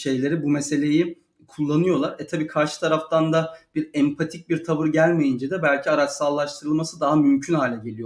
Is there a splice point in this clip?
no; 0 cuts

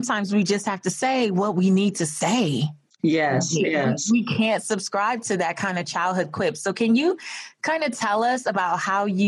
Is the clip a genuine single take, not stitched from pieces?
yes; 0 cuts

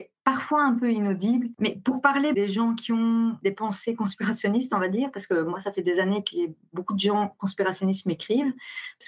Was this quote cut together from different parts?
yes; 1 cut; at 2.3 s

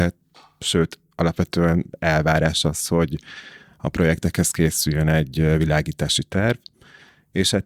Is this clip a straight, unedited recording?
yes; 0 cuts

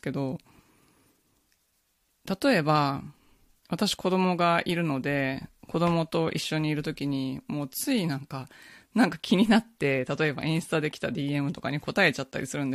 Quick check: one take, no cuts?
yes; 0 cuts

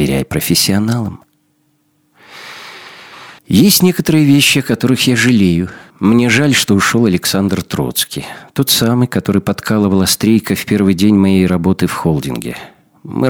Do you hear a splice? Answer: yes; 2 cuts; at 3.4 s, 5.9 s

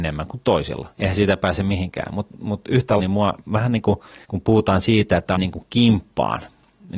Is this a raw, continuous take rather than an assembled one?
no; 5 cuts; at 0.9 s, 2.3 s, 3.0 s, 4.2 s, 5.3 s

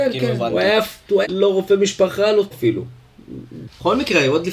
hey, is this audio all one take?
no; 2 cuts; at 1.2 s, 2.5 s

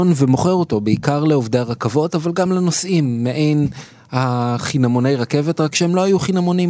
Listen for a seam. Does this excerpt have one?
no; 0 cuts

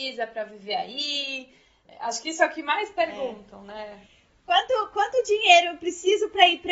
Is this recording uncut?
yes; 0 cuts

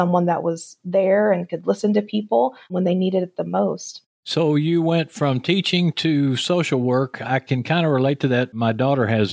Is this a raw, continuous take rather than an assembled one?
no; 1 cut; at 2.6 s

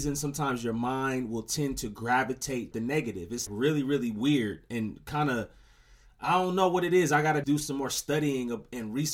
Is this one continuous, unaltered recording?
no; 3 cuts; at 2.7 s, 3.5 s, 7.4 s

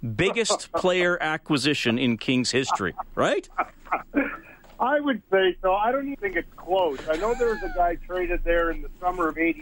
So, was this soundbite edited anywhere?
yes; 1 cut; at 6.1 s

